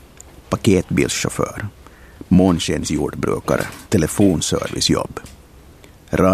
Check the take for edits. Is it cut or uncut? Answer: cut